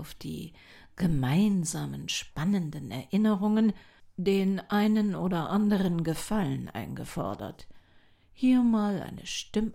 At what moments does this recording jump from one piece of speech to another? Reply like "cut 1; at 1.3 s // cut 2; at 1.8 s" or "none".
none